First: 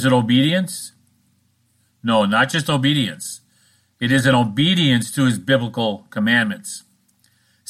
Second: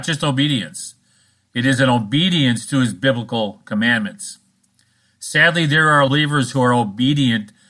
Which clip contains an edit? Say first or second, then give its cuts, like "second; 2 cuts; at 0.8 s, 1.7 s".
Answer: second; 1 cut; at 6.1 s